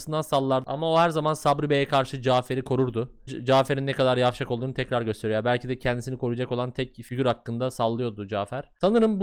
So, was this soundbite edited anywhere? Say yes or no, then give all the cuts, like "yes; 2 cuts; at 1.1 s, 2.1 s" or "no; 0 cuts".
yes; 1 cut; at 3.3 s